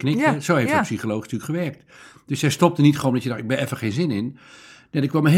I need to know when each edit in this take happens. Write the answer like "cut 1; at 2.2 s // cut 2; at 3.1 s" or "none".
none

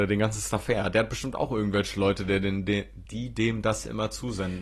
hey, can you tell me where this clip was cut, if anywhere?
cut 1; at 3.1 s

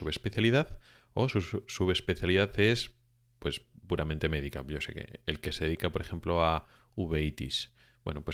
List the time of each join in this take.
none

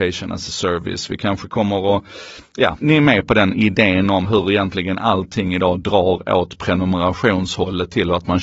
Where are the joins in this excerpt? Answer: cut 1; at 2.8 s // cut 2; at 4.2 s

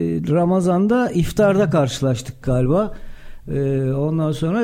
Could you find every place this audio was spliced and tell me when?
none

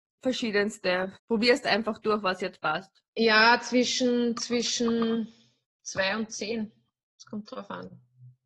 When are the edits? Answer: cut 1; at 1.2 s // cut 2; at 3.1 s

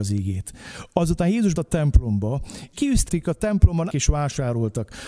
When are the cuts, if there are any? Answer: cut 1; at 1.5 s // cut 2; at 2.7 s // cut 3; at 3.1 s // cut 4; at 3.9 s

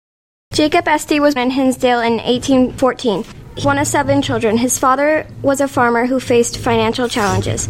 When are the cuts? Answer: cut 1; at 1.4 s // cut 2; at 3.6 s

